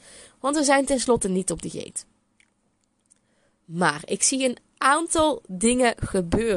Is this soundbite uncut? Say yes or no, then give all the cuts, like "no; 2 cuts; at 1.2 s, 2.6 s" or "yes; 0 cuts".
yes; 0 cuts